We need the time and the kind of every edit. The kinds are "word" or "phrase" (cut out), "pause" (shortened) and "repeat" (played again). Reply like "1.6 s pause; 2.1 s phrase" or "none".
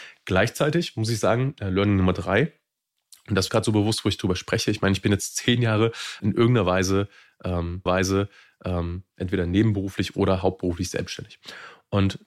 3.5 s phrase; 6.2 s word; 7.9 s repeat